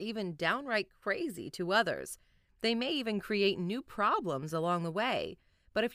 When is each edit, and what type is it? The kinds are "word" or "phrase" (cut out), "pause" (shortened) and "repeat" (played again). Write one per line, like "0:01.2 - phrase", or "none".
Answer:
none